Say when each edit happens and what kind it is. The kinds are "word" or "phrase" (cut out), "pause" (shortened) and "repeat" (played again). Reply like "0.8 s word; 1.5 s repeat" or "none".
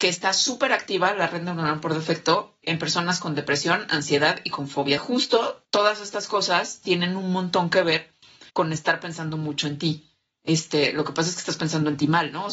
2.6 s word; 5.0 s phrase; 5.7 s pause; 8.5 s pause